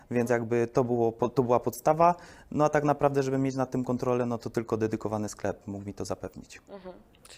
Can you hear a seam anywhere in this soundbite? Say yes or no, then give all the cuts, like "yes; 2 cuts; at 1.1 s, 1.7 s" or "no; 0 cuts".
no; 0 cuts